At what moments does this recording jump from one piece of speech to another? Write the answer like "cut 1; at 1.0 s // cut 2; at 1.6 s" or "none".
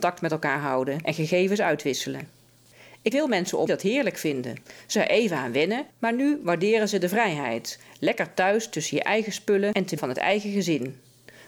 cut 1; at 3.1 s // cut 2; at 3.7 s // cut 3; at 4.9 s // cut 4; at 5.9 s // cut 5; at 10.0 s